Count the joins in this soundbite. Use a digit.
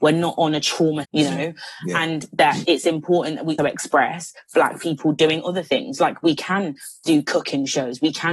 3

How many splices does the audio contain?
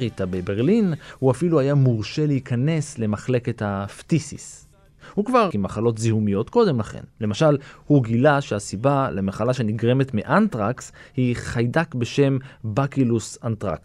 2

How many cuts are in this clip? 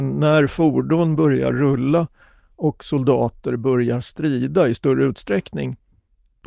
0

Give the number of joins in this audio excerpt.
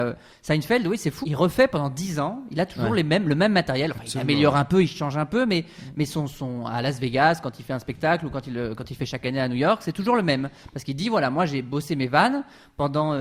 1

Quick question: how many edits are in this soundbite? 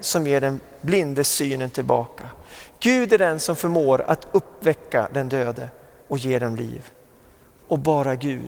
0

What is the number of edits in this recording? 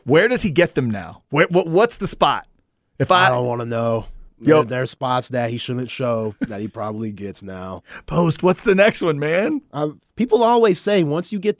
3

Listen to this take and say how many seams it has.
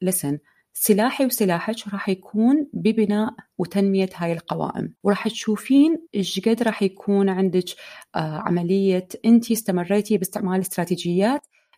3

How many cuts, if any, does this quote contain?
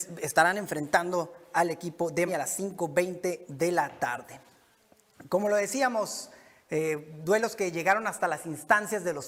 1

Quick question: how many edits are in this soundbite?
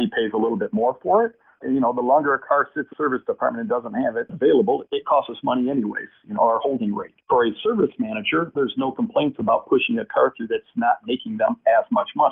4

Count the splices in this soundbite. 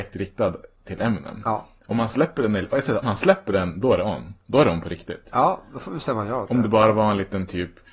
1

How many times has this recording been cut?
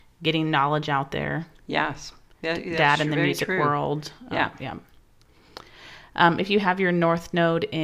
0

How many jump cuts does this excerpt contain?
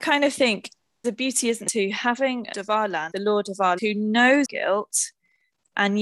6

